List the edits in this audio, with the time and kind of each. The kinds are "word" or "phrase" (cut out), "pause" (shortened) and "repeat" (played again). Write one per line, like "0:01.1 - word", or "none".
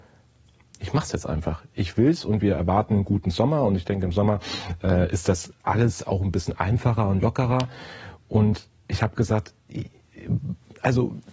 0:05.6 - pause